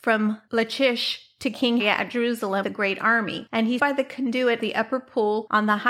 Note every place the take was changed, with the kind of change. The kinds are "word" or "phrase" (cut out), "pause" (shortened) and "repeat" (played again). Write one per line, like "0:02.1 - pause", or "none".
0:01.8 - word
0:02.6 - word
0:03.8 - word
0:04.6 - word